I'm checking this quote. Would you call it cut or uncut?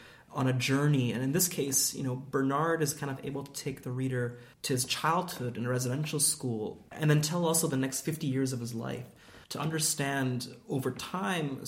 cut